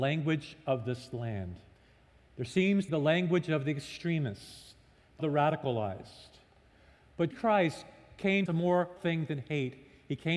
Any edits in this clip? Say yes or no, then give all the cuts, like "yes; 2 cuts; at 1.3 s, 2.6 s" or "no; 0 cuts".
yes; 6 cuts; at 1.7 s, 2.9 s, 5.2 s, 7.3 s, 8.5 s, 9.0 s